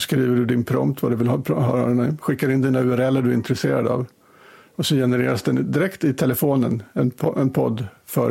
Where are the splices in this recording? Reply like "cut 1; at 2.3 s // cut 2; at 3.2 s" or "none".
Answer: none